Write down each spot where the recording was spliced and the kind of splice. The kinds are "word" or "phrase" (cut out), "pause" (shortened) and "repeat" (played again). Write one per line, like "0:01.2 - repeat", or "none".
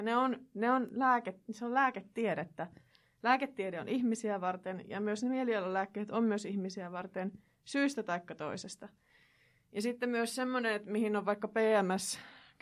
none